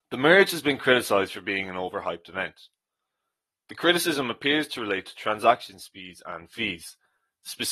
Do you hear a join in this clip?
no; 0 cuts

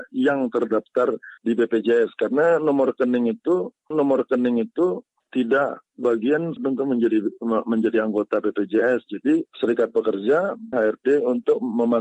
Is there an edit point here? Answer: yes; 5 cuts; at 1.4 s, 3.9 s, 6.6 s, 9.5 s, 10.7 s

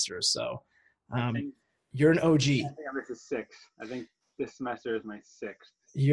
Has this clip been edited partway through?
no; 0 cuts

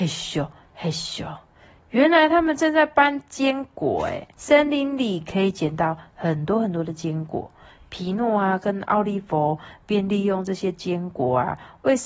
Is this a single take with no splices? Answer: no; 1 cut; at 4.3 s

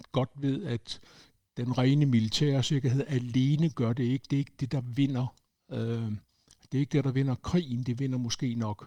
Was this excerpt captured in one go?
yes; 0 cuts

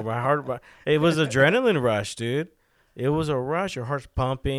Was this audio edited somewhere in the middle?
no; 0 cuts

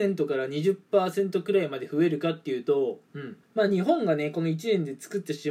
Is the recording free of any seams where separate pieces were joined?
no; 1 cut; at 3.4 s

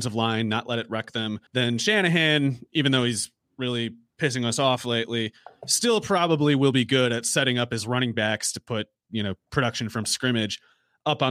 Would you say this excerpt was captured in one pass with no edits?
no; 1 cut; at 1.5 s

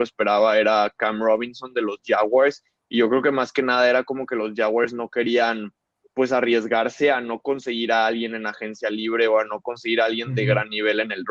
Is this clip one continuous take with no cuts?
yes; 0 cuts

